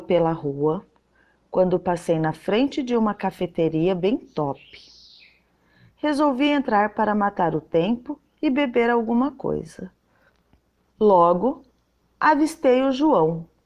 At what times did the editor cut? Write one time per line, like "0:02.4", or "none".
none